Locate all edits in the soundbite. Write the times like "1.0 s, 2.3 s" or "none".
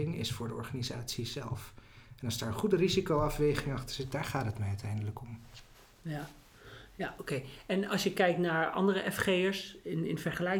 5.7 s